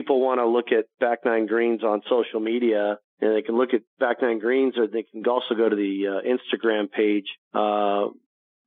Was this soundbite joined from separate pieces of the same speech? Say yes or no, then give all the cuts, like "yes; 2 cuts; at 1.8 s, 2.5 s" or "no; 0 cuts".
yes; 2 cuts; at 3.1 s, 7.4 s